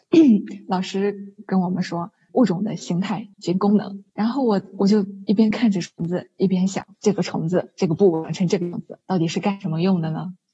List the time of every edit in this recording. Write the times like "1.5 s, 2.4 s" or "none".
2.3 s, 3.3 s, 4.1 s, 6.9 s, 9.0 s